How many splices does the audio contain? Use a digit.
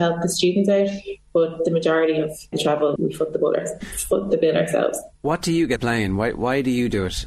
3